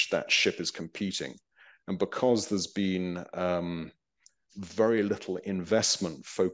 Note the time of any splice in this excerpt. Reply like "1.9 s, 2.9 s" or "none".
none